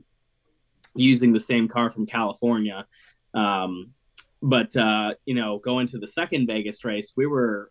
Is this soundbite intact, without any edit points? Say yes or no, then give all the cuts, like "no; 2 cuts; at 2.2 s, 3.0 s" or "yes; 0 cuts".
yes; 0 cuts